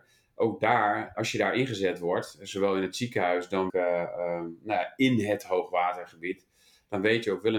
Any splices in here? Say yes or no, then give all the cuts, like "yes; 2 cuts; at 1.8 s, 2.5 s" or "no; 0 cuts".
yes; 2 cuts; at 1.1 s, 3.7 s